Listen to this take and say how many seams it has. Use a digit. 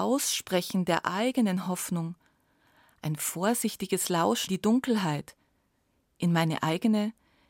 1